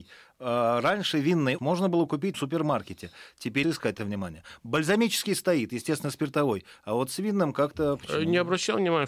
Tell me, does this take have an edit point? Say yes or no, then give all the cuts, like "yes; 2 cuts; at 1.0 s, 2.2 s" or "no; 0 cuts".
yes; 5 cuts; at 1.6 s, 2.3 s, 3.6 s, 4.0 s, 5.7 s